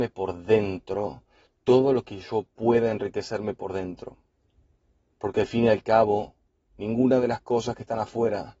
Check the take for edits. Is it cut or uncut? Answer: uncut